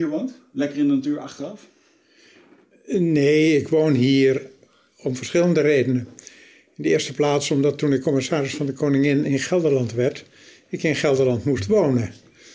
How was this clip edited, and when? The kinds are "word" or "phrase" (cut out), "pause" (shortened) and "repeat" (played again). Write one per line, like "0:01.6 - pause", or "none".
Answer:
none